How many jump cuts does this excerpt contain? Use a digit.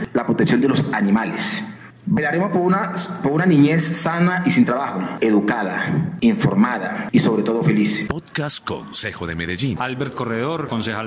0